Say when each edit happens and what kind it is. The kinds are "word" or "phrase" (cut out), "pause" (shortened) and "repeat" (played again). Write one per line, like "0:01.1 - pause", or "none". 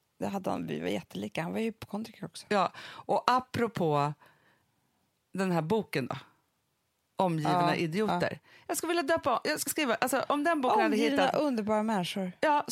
0:09.7 - word